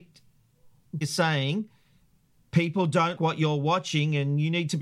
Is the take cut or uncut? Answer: cut